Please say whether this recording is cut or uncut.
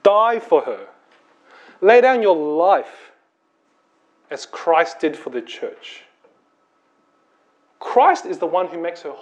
uncut